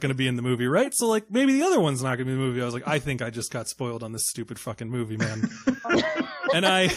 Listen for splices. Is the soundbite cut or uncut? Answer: uncut